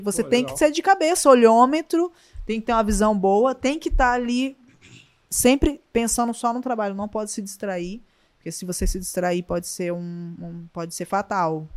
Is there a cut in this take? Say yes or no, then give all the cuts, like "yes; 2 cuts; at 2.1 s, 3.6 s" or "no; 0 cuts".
no; 0 cuts